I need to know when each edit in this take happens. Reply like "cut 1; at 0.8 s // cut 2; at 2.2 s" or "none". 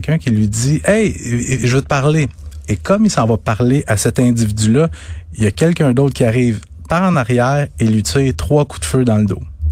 none